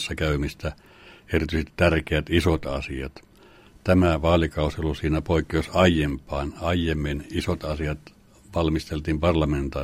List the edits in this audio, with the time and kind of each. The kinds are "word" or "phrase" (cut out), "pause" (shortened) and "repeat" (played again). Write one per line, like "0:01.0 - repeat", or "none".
none

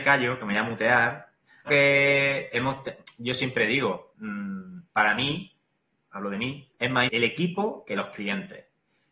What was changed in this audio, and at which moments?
0:01.7 - phrase
0:04.9 - pause
0:06.7 - pause
0:07.1 - word

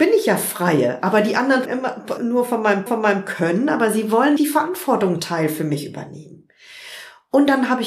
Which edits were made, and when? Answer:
0:01.6 - word
0:02.2 - word
0:02.9 - repeat
0:04.4 - word
0:05.2 - word

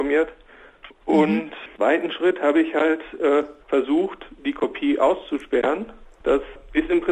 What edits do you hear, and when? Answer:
0:01.7 - pause
0:03.6 - pause

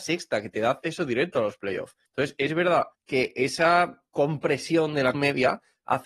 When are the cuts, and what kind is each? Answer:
0:02.1 - pause
0:02.9 - pause
0:05.1 - word

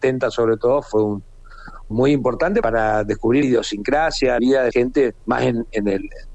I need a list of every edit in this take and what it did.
0:01.9 - phrase
0:02.6 - word
0:03.4 - word
0:04.4 - phrase
0:04.7 - word
0:05.2 - pause

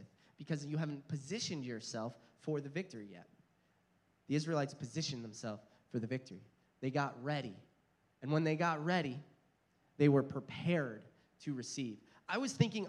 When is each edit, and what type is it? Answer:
none

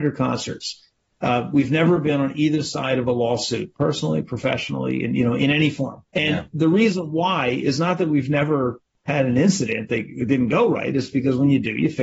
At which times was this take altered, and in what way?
0:06.1 - pause

